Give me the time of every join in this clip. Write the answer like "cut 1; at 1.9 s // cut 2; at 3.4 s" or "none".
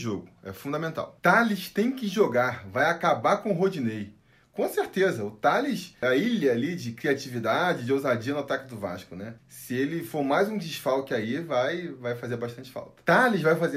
cut 1; at 9.4 s